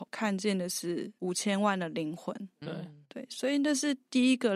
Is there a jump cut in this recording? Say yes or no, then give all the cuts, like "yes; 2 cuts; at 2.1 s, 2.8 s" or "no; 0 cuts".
yes; 1 cut; at 3.0 s